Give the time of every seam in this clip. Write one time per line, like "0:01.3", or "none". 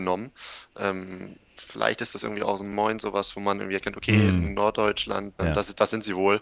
0:02.7
0:05.4